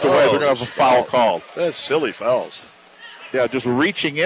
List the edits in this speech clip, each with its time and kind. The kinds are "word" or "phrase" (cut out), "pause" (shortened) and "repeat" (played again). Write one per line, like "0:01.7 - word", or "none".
none